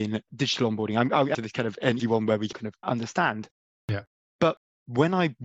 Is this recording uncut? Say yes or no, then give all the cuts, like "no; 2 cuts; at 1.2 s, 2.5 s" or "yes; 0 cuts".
no; 4 cuts; at 1.3 s, 2.0 s, 2.5 s, 2.8 s